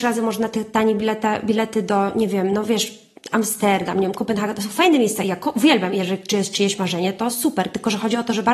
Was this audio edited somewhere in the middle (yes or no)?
no